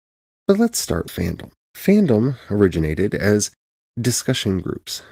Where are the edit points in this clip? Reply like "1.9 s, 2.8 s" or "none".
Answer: 1.1 s, 1.6 s